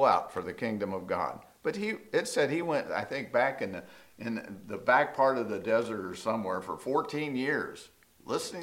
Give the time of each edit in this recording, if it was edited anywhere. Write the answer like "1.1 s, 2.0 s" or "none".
none